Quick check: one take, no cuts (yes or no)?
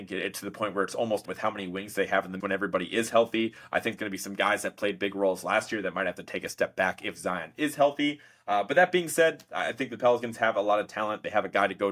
no